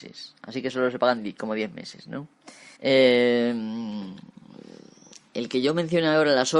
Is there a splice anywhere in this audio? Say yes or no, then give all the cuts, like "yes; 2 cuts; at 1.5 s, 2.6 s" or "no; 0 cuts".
yes; 1 cut; at 2.8 s